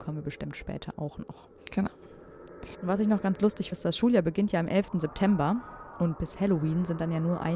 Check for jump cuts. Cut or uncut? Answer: cut